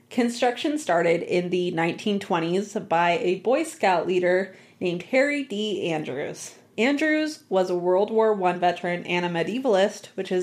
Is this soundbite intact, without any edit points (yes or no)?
yes